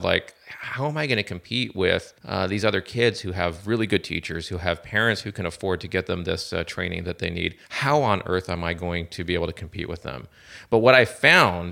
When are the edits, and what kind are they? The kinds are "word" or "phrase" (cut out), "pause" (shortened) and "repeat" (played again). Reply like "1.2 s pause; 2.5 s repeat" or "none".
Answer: 2.2 s pause; 7.6 s pause